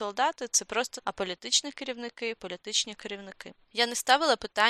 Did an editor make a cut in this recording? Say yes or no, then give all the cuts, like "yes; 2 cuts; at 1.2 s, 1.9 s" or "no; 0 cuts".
yes; 2 cuts; at 1.0 s, 2.4 s